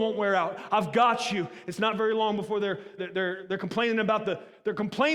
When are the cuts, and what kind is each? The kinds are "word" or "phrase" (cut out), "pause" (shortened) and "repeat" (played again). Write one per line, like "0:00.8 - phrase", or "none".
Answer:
0:03.0 - word